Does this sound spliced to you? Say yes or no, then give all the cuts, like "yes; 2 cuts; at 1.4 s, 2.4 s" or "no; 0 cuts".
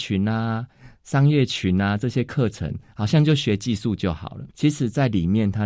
yes; 1 cut; at 4.5 s